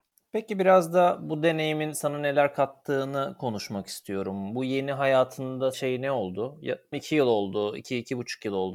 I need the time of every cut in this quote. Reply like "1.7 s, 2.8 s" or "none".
5.7 s, 6.9 s